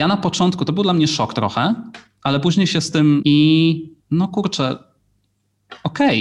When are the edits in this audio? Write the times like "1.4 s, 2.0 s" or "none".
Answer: 3.2 s, 4.0 s